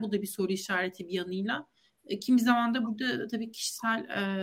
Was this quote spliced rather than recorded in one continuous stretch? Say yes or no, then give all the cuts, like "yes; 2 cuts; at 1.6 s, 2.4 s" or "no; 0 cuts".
no; 0 cuts